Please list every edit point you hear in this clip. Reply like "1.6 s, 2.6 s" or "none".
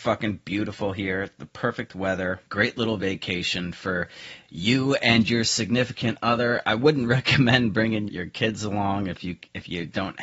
8.1 s